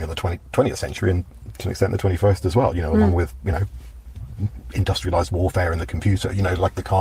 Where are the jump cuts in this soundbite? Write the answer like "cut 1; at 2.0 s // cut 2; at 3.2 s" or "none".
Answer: none

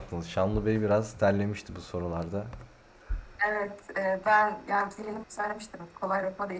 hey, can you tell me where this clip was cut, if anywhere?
cut 1; at 5.2 s

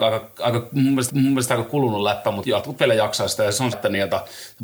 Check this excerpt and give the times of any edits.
cut 1; at 1.1 s // cut 2; at 2.4 s // cut 3; at 3.7 s

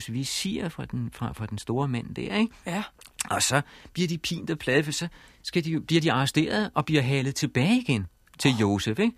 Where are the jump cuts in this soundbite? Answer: none

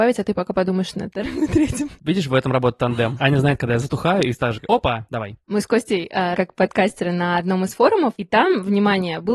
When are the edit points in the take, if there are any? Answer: cut 1; at 6.3 s

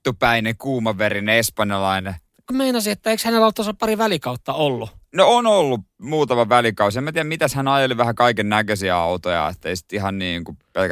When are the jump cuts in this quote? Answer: cut 1; at 2.5 s

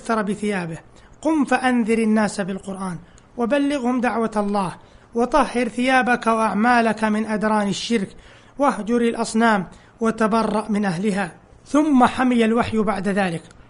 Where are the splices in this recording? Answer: none

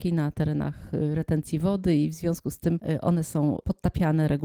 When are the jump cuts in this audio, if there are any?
none

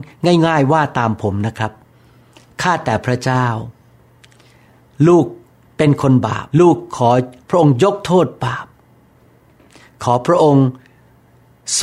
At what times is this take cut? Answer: cut 1; at 6.5 s

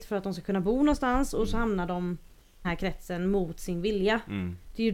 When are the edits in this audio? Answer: cut 1; at 2.6 s

